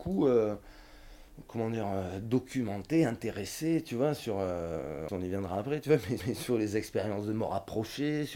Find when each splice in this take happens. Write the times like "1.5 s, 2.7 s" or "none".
5.1 s, 6.2 s